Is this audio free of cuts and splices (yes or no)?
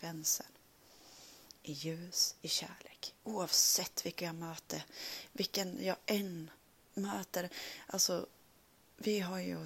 yes